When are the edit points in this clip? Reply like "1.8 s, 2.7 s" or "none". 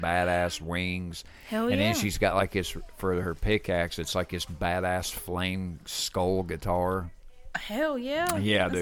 none